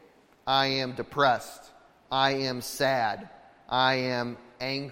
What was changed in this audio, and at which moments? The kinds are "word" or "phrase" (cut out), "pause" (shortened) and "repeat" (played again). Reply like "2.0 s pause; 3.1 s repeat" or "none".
none